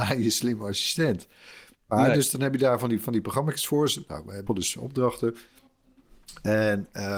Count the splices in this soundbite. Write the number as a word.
one